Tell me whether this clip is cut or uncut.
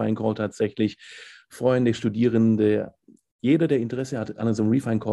uncut